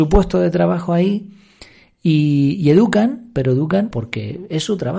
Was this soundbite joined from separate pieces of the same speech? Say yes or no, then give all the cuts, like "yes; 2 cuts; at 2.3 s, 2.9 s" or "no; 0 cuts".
yes; 1 cut; at 3.9 s